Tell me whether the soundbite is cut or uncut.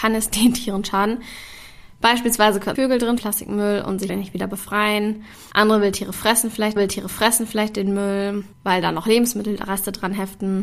cut